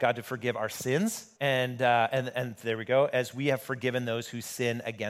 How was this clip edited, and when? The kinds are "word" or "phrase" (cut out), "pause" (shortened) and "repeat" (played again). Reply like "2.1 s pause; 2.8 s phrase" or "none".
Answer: 1.4 s pause